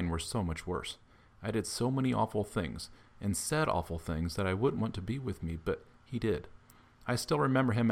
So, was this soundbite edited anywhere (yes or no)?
no